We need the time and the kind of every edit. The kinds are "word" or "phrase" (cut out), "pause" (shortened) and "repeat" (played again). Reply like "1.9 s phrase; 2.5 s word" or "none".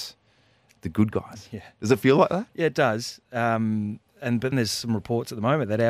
1.1 s phrase; 4.1 s pause; 4.5 s word